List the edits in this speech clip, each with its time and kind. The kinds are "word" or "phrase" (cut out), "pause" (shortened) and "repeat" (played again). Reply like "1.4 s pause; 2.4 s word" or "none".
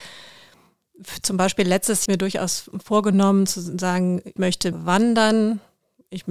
2.1 s phrase; 4.4 s word; 4.7 s word